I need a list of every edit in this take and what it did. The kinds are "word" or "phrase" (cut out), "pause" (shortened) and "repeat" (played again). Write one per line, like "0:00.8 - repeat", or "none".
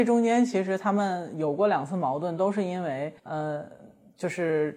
0:03.2 - pause